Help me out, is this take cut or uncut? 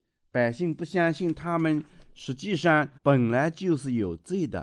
cut